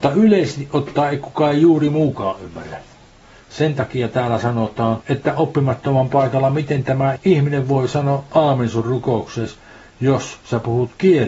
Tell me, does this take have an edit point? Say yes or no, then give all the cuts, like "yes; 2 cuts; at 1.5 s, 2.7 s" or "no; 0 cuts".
no; 0 cuts